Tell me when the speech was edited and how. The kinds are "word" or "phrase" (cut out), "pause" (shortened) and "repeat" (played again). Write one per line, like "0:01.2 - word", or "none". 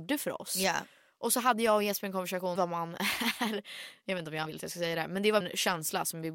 0:02.6 - phrase
0:04.5 - word
0:05.4 - word

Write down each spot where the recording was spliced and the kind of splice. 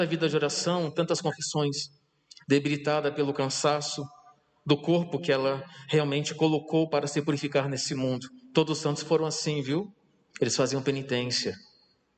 none

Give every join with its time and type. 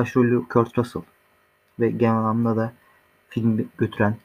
none

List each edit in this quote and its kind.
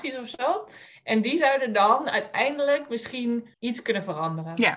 0:03.5 - pause

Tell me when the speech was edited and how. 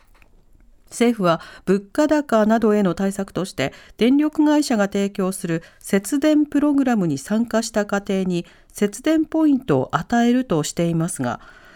none

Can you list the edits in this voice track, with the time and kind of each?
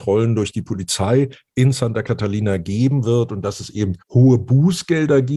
0:04.0 - pause

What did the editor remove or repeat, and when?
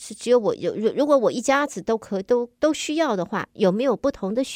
0:02.5 - pause

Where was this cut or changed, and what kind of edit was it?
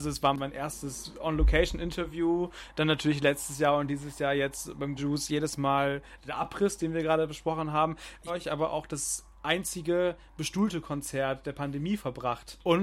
0:05.0 - word
0:08.3 - phrase

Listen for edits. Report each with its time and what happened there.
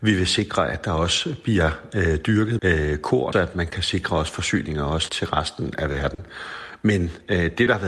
0:02.6 - word
0:03.3 - phrase
0:05.1 - word

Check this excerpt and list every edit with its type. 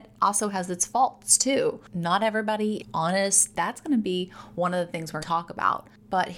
0:02.8 - word
0:05.2 - word

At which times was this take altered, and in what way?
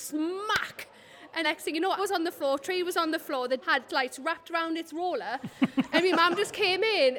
0:01.4 - word
0:02.0 - word
0:03.6 - word
0:03.9 - word

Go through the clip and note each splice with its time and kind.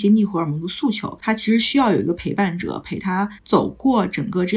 0:03.4 - pause

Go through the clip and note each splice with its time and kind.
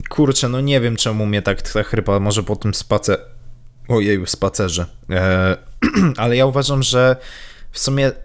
0:03.8 - pause

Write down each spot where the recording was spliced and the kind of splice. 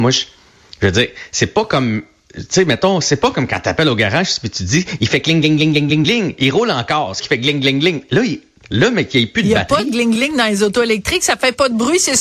0:06.0 - word
0:07.2 - word
0:10.2 - word

